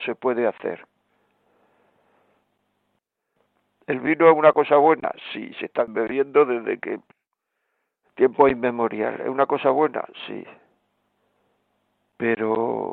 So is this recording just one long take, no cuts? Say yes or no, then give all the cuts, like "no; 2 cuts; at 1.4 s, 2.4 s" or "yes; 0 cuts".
yes; 0 cuts